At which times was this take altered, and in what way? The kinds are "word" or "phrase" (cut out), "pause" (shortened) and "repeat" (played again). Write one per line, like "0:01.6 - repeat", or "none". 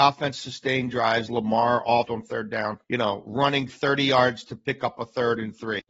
0:01.3 - word
0:02.0 - word
0:02.8 - pause